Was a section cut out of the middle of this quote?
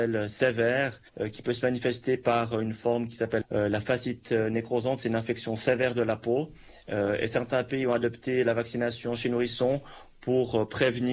yes; 2 cuts; at 1.1 s, 3.4 s

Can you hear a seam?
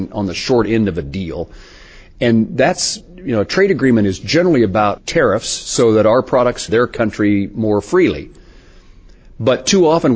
yes; 2 cuts; at 5.0 s, 6.7 s

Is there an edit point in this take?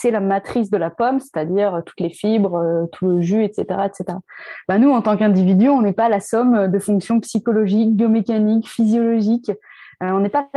no; 0 cuts

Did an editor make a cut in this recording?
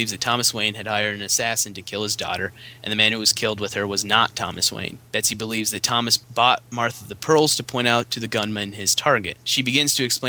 no; 0 cuts

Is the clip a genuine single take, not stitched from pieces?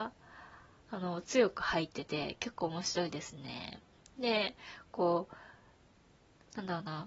yes; 0 cuts

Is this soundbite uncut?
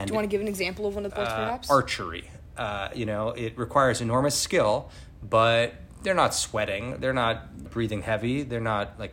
no; 2 cuts; at 1.1 s, 7.7 s

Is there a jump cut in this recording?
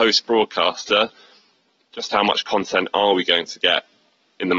no; 0 cuts

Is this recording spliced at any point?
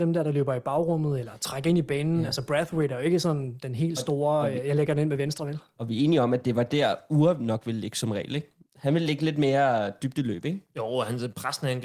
no; 0 cuts

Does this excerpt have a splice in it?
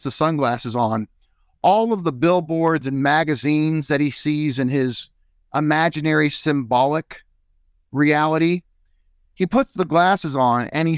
no; 0 cuts

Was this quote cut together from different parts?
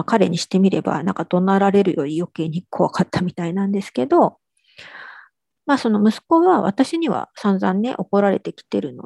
no; 0 cuts

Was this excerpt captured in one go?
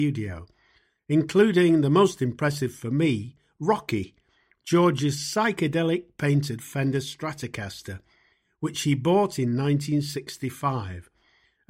yes; 0 cuts

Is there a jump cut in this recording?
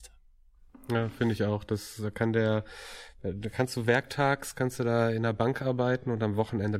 no; 0 cuts

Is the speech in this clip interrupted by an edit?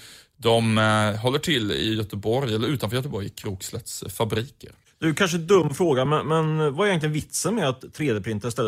no; 0 cuts

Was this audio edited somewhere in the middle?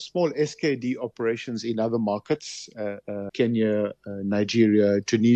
yes; 1 cut; at 3.3 s

